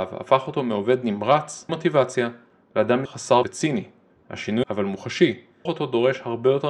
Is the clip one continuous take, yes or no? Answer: no